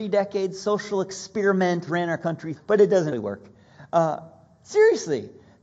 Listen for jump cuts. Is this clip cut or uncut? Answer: cut